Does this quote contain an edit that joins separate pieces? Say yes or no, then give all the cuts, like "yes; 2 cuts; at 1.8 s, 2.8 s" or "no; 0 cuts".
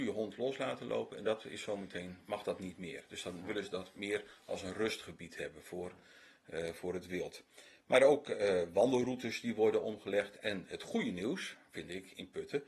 no; 0 cuts